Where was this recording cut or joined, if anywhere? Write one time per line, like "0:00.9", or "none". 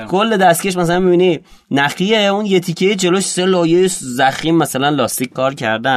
none